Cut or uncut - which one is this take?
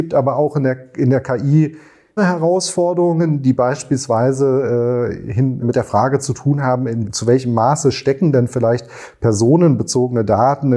cut